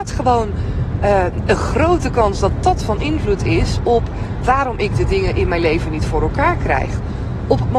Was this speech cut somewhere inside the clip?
no; 0 cuts

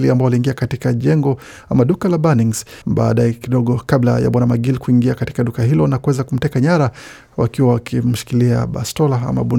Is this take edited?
yes; 1 cut; at 2.8 s

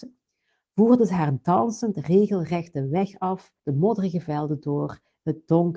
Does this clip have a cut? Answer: yes; 1 cut; at 3.6 s

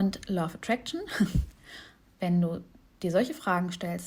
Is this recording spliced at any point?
no; 0 cuts

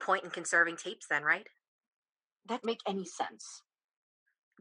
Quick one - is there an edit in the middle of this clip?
yes; 1 cut; at 2.6 s

